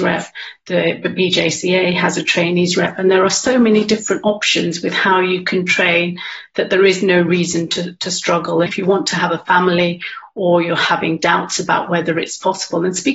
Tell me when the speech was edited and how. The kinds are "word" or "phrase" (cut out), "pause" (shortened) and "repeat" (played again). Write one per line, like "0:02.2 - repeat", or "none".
0:08.7 - word